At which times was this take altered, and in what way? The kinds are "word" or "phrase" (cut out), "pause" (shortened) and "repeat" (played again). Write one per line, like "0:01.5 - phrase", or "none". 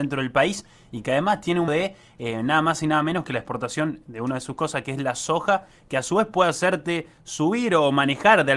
0:01.7 - word